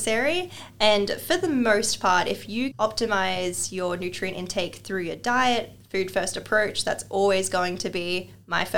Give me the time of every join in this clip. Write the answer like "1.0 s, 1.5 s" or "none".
2.7 s